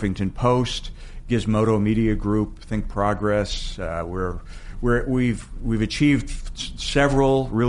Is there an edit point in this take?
no; 0 cuts

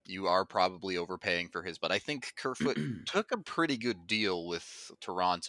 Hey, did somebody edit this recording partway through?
yes; 1 cut; at 1.8 s

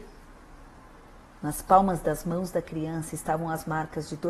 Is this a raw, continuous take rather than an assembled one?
yes; 0 cuts

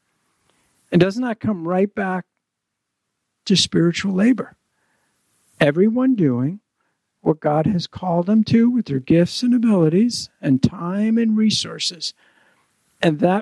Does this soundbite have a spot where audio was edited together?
no; 0 cuts

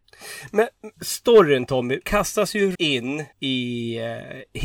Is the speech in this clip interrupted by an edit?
yes; 4 cuts; at 0.9 s, 2.0 s, 2.8 s, 3.3 s

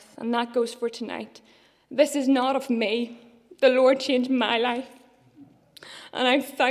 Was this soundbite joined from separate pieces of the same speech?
no; 0 cuts

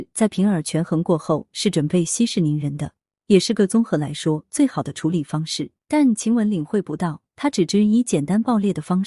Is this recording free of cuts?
no; 1 cut; at 5.8 s

